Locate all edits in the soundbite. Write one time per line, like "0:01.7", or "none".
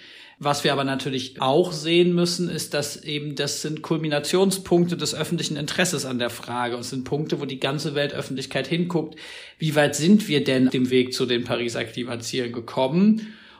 0:01.4
0:10.7

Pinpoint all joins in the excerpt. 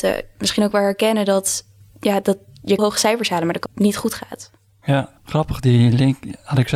0:01.8
0:02.8
0:03.7
0:05.2

